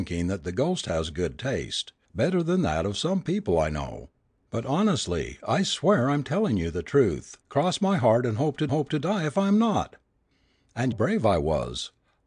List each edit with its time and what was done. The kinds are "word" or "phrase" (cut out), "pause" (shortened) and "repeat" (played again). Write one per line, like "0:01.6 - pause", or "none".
0:04.3 - pause
0:07.4 - pause
0:08.7 - repeat
0:10.9 - phrase